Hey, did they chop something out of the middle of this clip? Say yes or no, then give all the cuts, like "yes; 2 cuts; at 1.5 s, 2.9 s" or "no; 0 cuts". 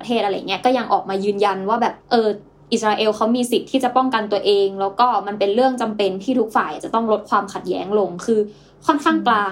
yes; 1 cut; at 2.0 s